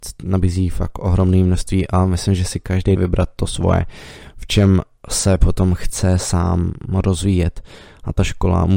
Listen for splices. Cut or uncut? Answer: cut